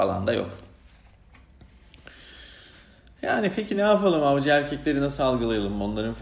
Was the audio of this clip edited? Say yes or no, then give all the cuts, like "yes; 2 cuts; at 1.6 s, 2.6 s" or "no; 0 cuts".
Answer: no; 0 cuts